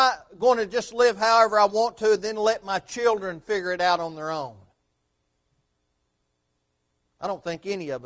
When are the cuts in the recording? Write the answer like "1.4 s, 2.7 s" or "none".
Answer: none